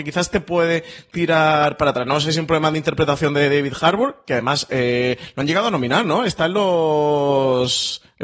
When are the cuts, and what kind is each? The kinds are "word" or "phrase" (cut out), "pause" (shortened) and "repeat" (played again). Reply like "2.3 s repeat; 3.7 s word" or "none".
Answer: none